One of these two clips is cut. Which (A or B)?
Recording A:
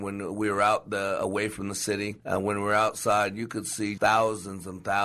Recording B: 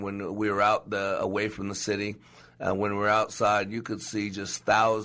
A